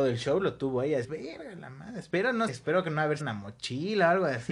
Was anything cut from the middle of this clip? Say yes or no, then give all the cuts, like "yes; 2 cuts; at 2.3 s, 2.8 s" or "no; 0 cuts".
yes; 3 cuts; at 1.0 s, 2.5 s, 3.2 s